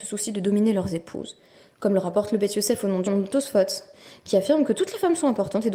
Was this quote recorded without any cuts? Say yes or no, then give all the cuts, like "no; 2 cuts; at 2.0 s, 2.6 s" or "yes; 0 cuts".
no; 1 cut; at 3.1 s